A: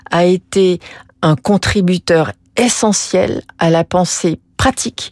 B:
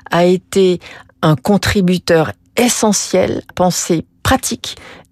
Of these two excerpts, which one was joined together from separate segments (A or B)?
B